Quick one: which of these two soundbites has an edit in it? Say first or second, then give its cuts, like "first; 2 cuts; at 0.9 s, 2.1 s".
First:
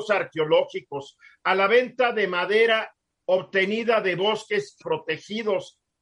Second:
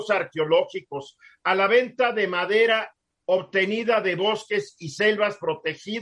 first; 1 cut; at 4.8 s